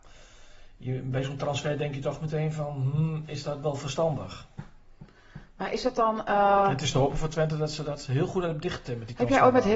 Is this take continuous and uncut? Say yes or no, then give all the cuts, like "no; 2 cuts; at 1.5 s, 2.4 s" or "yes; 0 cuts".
yes; 0 cuts